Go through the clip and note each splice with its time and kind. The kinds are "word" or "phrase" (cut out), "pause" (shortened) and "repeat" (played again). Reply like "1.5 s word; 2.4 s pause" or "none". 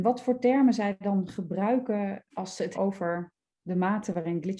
2.3 s word; 2.7 s word